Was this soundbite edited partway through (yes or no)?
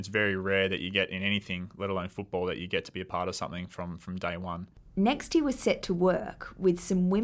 no